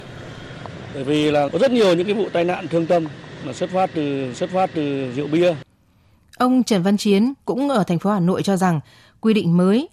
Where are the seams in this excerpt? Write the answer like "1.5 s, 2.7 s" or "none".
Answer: 1.5 s, 4.3 s